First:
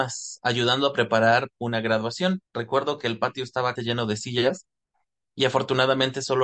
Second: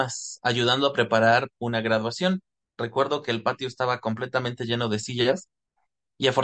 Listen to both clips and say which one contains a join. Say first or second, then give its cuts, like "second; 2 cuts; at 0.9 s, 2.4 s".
first; 2 cuts; at 2.5 s, 3.8 s